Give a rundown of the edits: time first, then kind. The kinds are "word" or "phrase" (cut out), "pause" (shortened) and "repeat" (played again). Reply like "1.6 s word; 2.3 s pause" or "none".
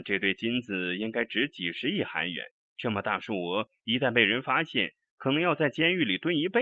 2.6 s pause